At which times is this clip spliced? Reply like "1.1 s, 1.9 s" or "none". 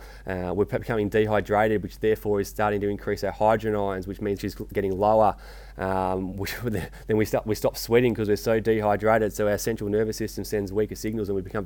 4.4 s